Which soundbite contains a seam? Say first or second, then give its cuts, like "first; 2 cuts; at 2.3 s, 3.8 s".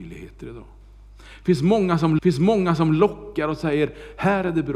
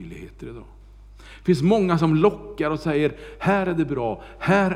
first; 1 cut; at 2.2 s